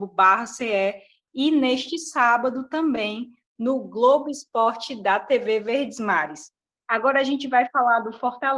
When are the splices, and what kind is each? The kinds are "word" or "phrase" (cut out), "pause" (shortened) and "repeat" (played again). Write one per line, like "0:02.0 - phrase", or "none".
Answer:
none